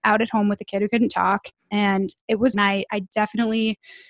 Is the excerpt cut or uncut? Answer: cut